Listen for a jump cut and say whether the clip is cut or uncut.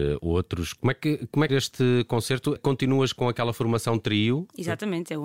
cut